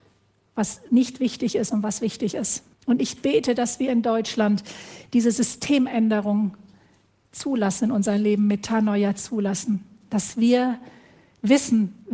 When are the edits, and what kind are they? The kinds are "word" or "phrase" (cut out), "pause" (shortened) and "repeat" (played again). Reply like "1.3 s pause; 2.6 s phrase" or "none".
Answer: 2.7 s pause